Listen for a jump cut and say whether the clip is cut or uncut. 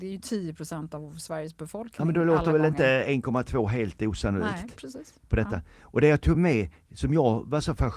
uncut